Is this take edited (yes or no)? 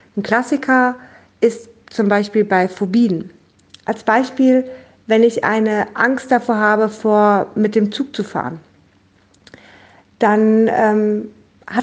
no